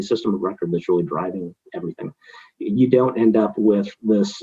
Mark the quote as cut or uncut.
uncut